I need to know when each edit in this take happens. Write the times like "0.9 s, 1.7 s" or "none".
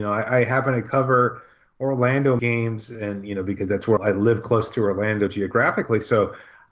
2.4 s, 4.0 s